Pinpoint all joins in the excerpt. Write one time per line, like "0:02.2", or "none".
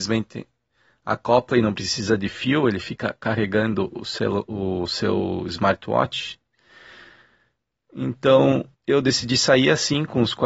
0:08.7